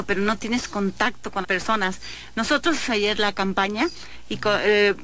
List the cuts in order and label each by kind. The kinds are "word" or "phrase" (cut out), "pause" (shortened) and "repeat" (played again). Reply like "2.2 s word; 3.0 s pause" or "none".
1.4 s word; 2.9 s word